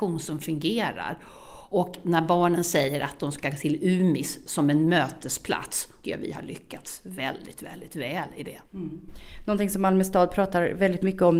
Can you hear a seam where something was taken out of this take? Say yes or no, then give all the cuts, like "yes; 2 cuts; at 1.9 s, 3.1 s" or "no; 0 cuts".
yes; 2 cuts; at 6.0 s, 8.7 s